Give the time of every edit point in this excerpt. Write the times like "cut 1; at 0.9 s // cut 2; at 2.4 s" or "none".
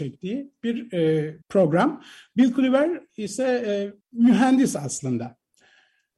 cut 1; at 1.4 s // cut 2; at 4.0 s